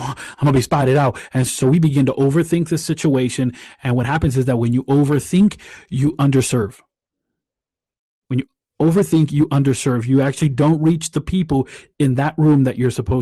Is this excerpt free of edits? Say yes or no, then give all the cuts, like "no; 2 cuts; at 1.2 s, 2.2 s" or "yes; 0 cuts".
yes; 0 cuts